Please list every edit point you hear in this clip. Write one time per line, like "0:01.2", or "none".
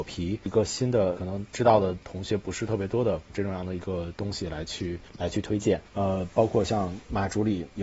0:05.1
0:05.9